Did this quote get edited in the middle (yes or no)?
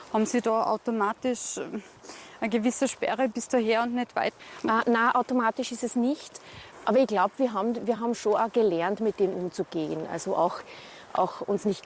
no